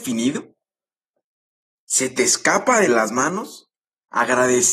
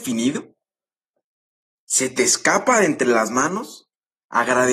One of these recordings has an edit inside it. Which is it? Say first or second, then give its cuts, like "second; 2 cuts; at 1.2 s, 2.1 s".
first; 1 cut; at 2.9 s